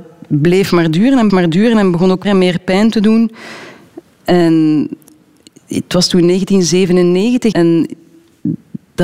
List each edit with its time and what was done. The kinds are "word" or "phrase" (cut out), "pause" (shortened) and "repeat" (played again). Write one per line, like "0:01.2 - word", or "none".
0:01.3 - word
0:02.2 - word
0:07.5 - word